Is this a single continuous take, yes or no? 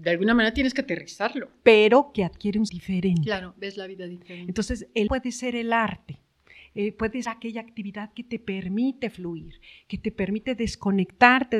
no